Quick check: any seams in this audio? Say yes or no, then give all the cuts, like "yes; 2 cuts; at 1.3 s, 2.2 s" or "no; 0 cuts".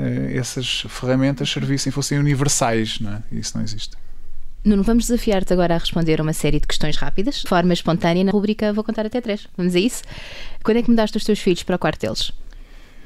yes; 2 cuts; at 7.5 s, 8.3 s